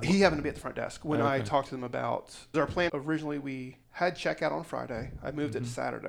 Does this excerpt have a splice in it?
yes; 3 cuts; at 2.5 s, 2.9 s, 3.8 s

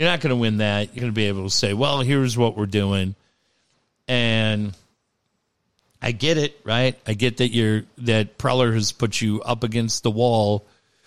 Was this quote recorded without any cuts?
no; 1 cut; at 1.0 s

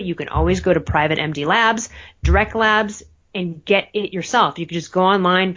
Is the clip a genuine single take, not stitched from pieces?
yes; 0 cuts

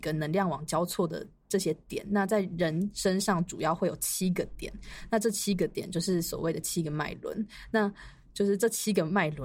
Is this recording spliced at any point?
no; 0 cuts

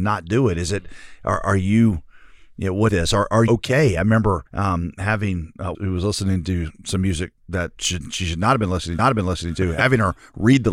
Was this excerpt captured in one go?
no; 6 cuts; at 2.9 s, 3.5 s, 4.5 s, 5.7 s, 7.4 s, 9.0 s

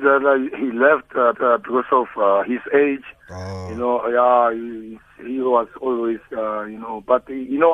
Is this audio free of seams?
no; 1 cut; at 1.3 s

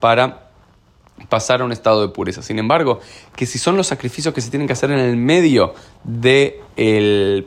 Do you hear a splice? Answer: no; 0 cuts

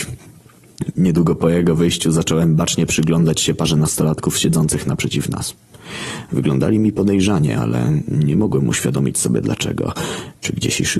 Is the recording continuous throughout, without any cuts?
yes; 0 cuts

